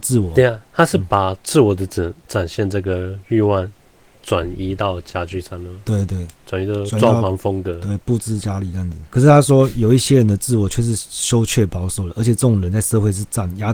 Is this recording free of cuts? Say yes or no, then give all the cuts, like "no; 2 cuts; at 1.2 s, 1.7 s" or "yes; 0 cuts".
yes; 0 cuts